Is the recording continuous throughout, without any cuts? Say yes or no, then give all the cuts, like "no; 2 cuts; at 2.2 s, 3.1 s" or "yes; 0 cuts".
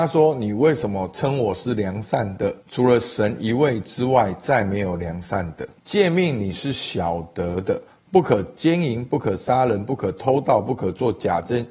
no; 3 cuts; at 2.6 s, 5.8 s, 7.9 s